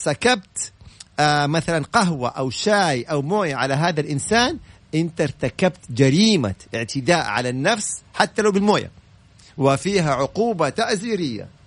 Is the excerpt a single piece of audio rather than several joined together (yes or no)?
yes